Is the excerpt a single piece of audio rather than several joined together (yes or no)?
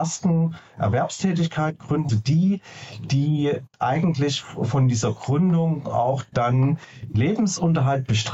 no